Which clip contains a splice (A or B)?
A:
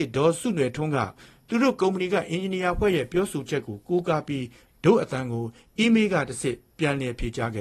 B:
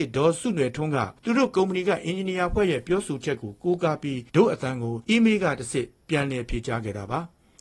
B